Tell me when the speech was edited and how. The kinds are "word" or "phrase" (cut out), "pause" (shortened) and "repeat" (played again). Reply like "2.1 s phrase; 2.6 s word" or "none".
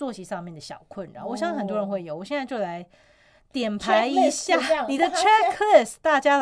none